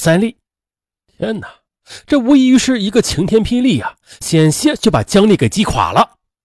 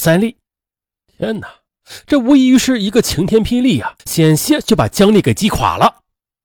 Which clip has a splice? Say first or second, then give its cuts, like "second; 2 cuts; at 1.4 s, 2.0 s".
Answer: second; 1 cut; at 4.0 s